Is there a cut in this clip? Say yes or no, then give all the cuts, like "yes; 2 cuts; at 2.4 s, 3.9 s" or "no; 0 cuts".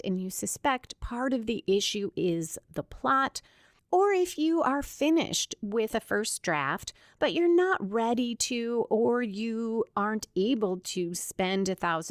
no; 0 cuts